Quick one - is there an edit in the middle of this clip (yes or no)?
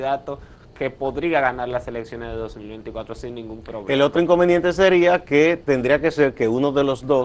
no